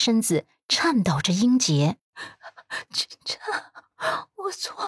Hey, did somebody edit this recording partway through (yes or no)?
yes